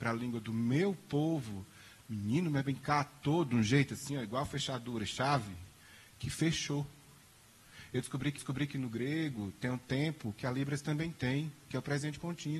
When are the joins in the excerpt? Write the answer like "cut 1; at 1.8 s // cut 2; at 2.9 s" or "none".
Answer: cut 1; at 8.4 s